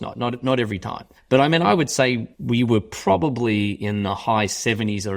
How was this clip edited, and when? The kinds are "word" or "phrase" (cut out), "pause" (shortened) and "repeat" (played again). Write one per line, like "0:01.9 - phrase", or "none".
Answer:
0:01.2 - pause
0:02.3 - pause